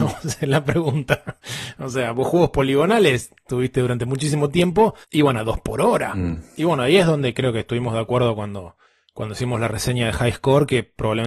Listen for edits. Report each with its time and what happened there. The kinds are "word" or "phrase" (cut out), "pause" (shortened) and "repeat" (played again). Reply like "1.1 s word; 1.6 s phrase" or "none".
5.0 s pause; 8.8 s pause